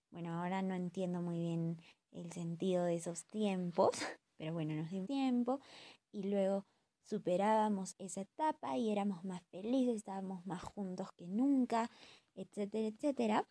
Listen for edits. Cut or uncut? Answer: cut